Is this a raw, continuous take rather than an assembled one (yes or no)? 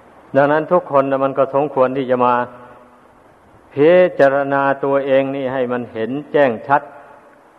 yes